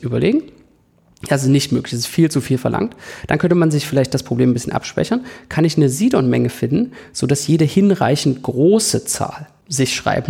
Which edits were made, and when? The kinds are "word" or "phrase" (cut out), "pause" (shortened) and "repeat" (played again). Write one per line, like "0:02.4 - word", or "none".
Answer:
none

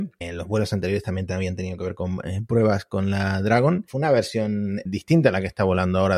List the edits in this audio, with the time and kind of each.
none

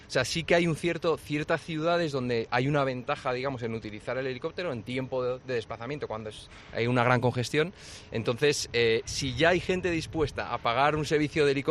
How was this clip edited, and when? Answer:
none

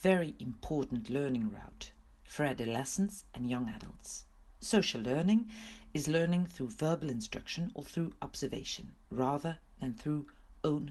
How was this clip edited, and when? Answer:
none

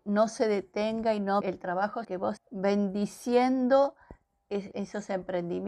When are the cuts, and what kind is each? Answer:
0:01.4 - word
0:02.0 - word
0:02.4 - word
0:04.7 - word

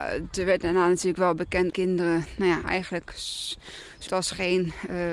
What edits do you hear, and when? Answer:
0:01.7 - word
0:04.1 - word

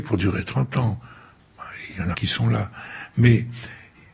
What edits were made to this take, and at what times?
0:02.1 - word

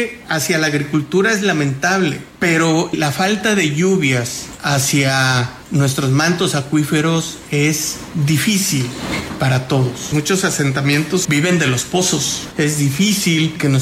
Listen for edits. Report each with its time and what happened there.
0:11.2 - word

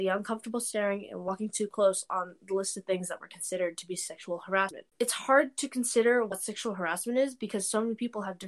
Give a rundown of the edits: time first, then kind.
0:04.9 - pause

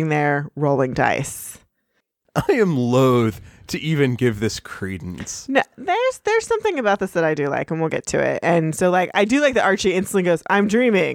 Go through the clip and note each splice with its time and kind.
none

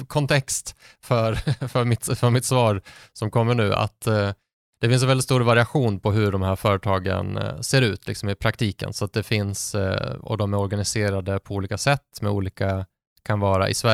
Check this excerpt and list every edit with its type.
none

